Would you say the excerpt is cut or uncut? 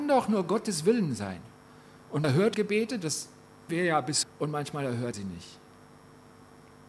cut